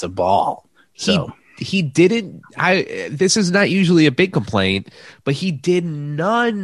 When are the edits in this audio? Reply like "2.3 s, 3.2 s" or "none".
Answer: none